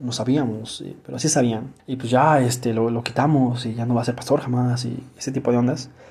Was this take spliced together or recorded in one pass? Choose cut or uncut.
cut